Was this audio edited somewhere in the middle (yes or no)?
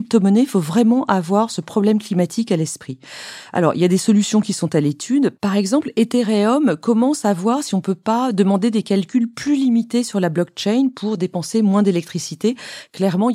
no